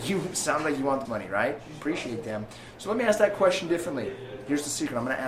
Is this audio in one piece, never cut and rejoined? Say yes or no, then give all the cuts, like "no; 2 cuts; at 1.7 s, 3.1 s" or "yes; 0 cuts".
no; 1 cut; at 1.0 s